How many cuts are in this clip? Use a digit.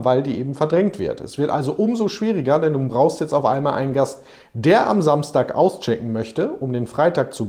0